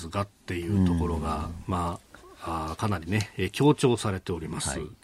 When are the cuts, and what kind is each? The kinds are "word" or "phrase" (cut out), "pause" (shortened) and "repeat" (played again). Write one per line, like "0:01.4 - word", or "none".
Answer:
none